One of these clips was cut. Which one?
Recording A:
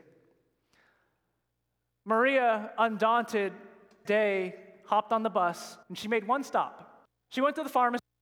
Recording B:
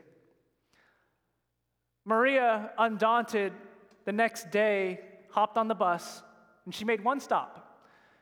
A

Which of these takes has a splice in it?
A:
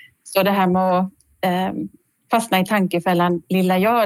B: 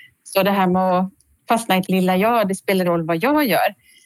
B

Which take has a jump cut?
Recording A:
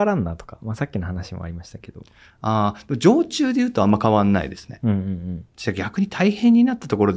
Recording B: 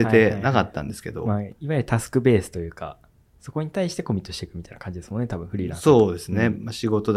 A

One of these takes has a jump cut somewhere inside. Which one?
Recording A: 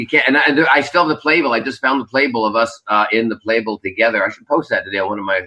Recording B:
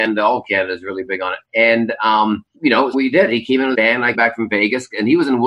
B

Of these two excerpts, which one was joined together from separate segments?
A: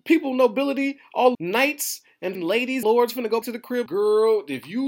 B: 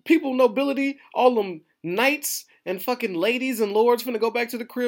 A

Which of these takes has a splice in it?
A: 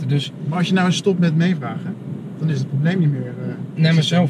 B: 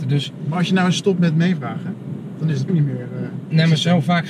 B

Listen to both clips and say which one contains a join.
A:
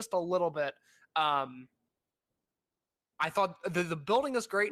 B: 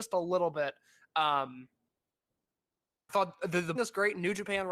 B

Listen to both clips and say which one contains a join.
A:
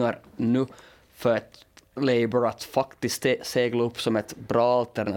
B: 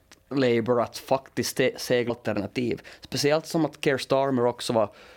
B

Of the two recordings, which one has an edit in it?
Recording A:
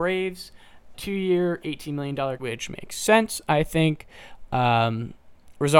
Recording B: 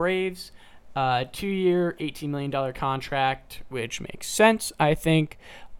A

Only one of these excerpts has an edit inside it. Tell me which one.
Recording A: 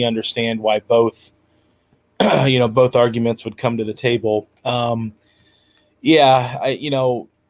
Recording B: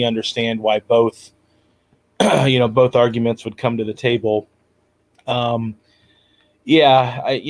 A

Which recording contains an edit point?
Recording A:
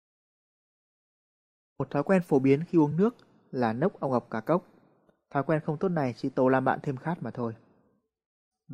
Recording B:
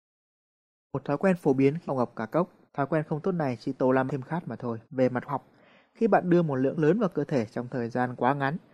B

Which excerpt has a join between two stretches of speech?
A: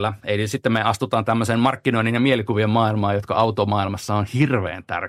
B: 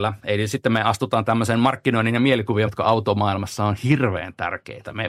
B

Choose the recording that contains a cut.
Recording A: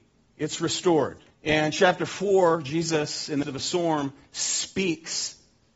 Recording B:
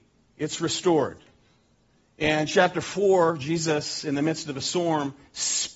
A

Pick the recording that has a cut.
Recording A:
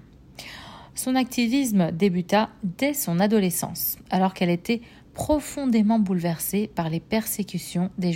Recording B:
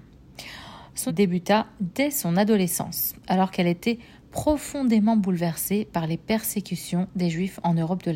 B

